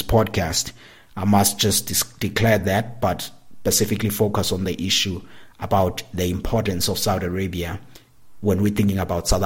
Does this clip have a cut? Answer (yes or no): no